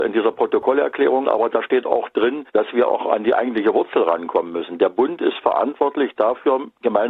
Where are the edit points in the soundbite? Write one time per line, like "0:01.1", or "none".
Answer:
0:01.2
0:02.5